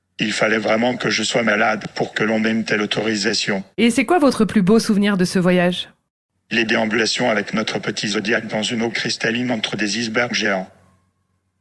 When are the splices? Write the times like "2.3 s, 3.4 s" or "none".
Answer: none